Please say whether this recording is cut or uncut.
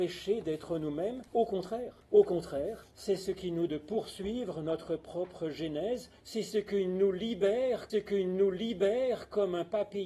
cut